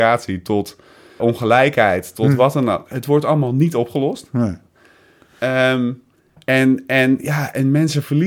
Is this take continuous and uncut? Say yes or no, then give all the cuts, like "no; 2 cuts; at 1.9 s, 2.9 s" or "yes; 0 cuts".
no; 1 cut; at 1.2 s